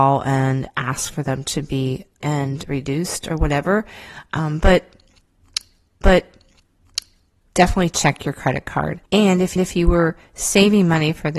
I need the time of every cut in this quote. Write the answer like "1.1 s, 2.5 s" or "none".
2.2 s, 6.0 s, 9.1 s, 9.6 s